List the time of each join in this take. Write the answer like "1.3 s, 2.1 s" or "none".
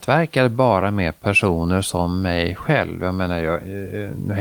none